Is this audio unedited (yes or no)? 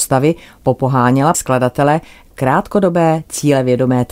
no